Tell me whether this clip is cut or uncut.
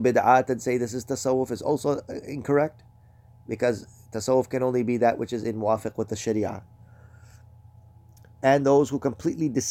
uncut